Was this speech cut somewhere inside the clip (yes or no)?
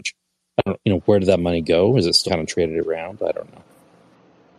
yes